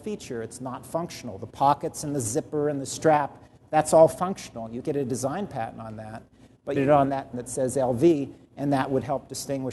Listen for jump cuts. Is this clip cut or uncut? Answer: cut